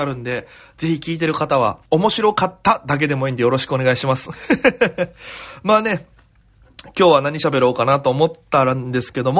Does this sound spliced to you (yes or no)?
yes